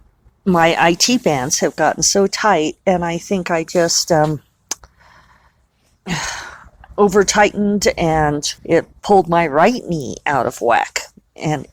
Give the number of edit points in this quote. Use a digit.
1